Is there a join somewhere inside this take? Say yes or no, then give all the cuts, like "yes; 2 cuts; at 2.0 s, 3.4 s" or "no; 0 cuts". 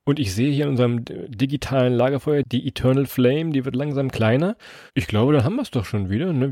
yes; 1 cut; at 4.9 s